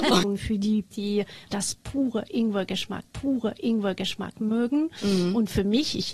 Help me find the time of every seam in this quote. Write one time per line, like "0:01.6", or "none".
0:00.9
0:01.5
0:03.0